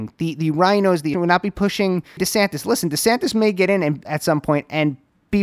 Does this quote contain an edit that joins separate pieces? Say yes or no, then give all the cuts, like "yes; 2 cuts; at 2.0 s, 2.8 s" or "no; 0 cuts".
yes; 3 cuts; at 1.1 s, 2.2 s, 4.0 s